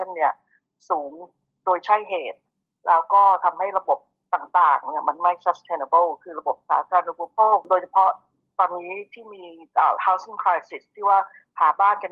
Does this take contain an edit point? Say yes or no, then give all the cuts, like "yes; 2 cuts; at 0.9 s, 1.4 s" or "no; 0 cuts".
no; 0 cuts